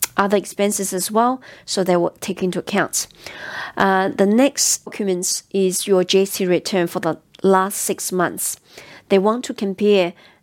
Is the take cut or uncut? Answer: uncut